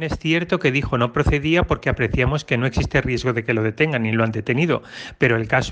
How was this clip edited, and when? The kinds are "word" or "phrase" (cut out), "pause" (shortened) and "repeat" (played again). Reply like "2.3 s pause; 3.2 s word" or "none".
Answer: none